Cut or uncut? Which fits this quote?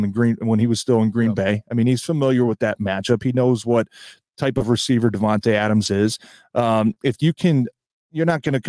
uncut